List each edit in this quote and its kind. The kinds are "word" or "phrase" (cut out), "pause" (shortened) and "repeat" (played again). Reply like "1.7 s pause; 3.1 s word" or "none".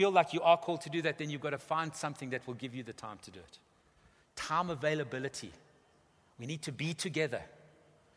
none